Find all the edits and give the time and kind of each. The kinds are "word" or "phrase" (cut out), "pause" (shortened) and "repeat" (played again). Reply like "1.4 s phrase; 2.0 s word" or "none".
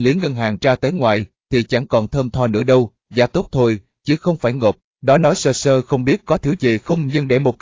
none

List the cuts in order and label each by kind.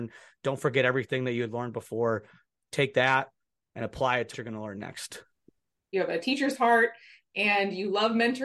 4.3 s word; 5.9 s word

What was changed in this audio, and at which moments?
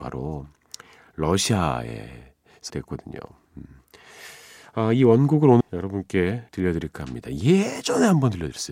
2.7 s word; 5.6 s word; 6.5 s pause

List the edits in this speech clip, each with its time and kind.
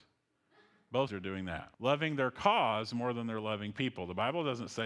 1.1 s word; 1.7 s pause

